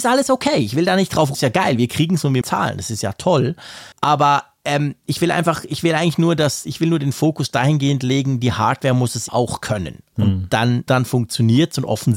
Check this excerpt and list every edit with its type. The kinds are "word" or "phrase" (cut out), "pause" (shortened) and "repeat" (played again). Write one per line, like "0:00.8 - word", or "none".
0:01.3 - phrase
0:02.4 - phrase
0:03.9 - pause
0:09.3 - word
0:10.9 - word